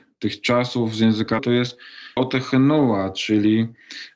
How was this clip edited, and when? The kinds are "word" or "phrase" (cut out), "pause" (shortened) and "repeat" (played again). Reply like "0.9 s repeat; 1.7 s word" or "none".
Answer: 1.4 s word; 2.2 s word